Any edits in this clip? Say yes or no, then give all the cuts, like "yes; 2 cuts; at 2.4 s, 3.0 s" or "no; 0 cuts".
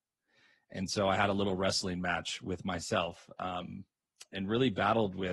no; 0 cuts